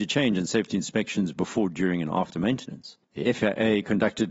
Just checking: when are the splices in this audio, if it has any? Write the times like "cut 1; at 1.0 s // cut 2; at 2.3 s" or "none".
cut 1; at 3.0 s